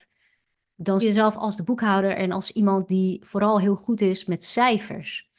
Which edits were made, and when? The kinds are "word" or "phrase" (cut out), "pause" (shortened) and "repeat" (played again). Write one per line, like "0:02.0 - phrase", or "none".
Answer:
0:01.0 - word

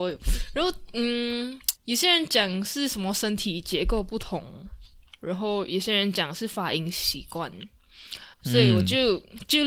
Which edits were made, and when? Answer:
0:01.8 - pause
0:08.3 - pause

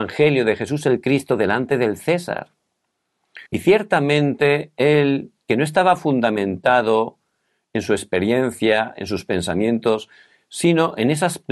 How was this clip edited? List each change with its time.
0:03.5 - pause
0:05.4 - pause

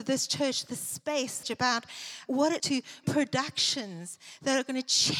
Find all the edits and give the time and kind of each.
0:01.4 - word
0:02.3 - word
0:02.6 - word
0:03.0 - word

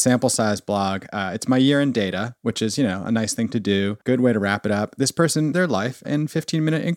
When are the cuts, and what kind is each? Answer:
0:04.0 - pause
0:05.5 - word
0:06.0 - word

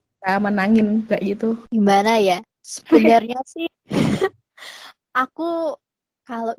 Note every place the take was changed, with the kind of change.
0:01.1 - word
0:01.7 - pause
0:02.5 - pause

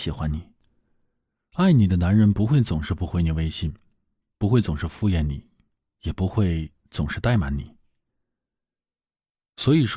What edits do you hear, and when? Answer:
none

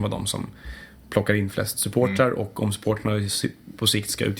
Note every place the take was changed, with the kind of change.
none

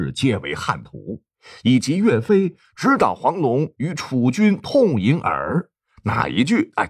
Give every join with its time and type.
0:01.3 - pause
0:05.7 - pause

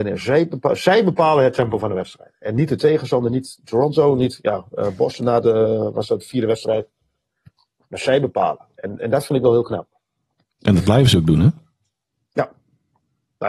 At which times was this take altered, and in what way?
0:05.2 - word

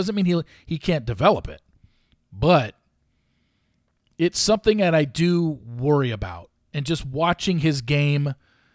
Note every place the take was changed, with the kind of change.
none

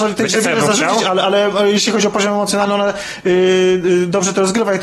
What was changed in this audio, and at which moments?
none

